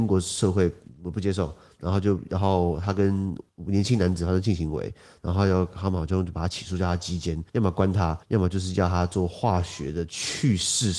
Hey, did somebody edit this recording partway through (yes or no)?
yes